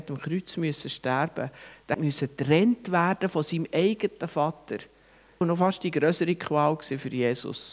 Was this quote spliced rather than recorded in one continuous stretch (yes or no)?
yes